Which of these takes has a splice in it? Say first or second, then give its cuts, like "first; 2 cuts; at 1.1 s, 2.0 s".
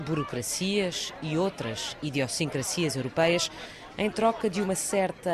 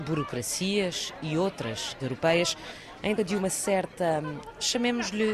second; 2 cuts; at 2.0 s, 3.2 s